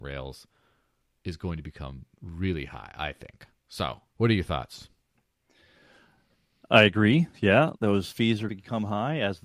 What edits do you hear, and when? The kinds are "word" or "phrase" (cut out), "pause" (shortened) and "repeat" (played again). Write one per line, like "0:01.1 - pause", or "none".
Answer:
0:04.1 - pause
0:08.5 - phrase

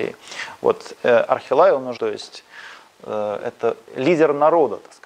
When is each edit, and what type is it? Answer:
0:02.0 - word

